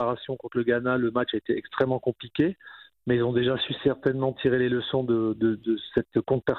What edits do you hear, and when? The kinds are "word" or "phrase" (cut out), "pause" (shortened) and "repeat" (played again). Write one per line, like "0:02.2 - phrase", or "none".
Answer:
none